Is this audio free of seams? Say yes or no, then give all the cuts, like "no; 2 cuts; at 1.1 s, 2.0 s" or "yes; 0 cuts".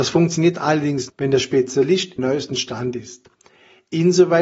no; 2 cuts; at 1.1 s, 2.2 s